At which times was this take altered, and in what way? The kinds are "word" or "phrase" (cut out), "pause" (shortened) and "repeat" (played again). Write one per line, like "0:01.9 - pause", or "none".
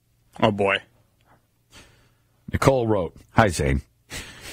0:03.2 - pause